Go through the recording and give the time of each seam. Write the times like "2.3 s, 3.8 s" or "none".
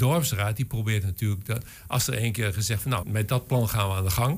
3.0 s